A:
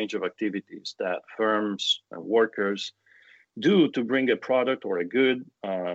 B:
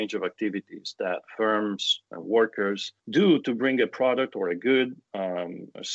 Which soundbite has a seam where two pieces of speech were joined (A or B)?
B